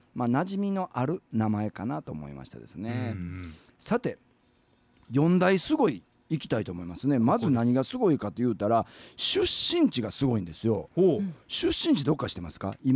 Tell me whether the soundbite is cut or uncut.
uncut